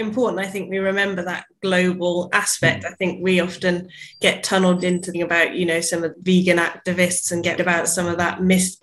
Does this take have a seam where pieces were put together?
yes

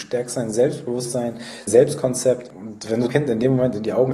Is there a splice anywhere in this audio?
yes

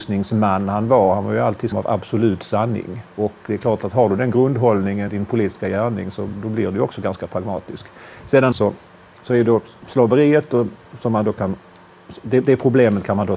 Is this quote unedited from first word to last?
no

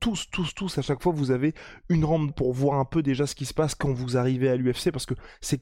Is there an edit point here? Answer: yes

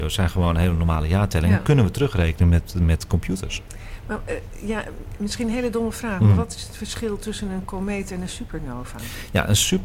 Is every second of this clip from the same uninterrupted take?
yes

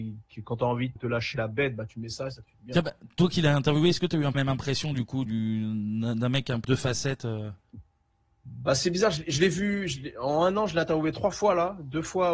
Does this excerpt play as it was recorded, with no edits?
no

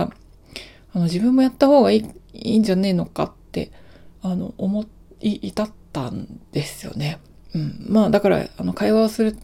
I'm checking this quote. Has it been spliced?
yes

